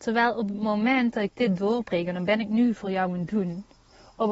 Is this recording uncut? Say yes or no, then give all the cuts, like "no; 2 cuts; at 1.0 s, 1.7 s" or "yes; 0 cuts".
yes; 0 cuts